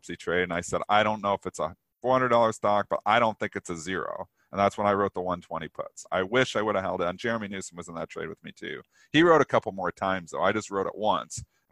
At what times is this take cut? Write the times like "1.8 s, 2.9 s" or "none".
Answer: none